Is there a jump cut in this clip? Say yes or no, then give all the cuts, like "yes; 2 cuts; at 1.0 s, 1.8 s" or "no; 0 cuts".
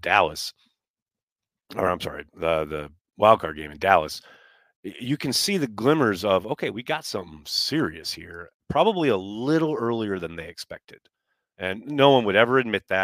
no; 0 cuts